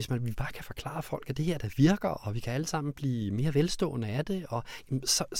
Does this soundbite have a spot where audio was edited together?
no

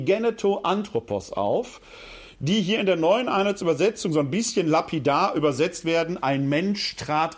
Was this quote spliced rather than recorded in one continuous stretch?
no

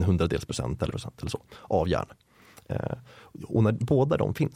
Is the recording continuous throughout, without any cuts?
no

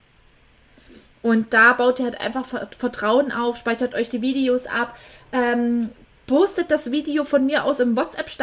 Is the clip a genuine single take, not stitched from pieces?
yes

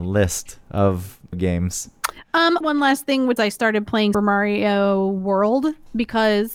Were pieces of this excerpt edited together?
yes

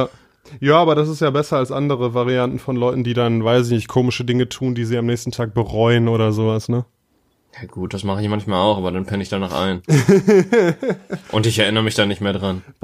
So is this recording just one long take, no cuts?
yes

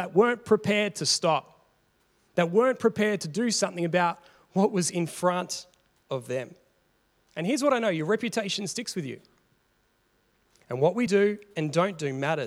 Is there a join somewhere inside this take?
no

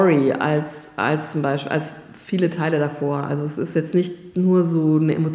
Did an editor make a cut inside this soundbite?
no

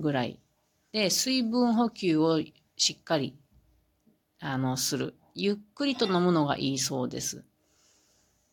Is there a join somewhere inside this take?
no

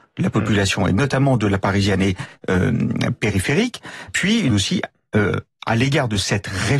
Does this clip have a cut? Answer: yes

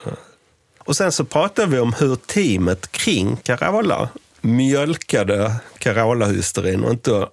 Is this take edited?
no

